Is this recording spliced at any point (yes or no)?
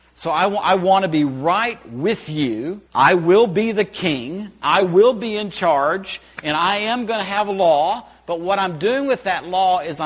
yes